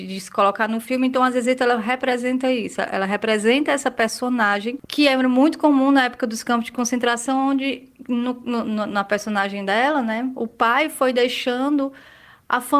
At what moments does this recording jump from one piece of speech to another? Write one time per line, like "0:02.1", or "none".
none